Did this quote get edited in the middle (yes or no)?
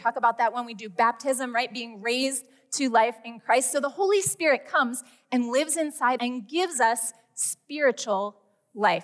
yes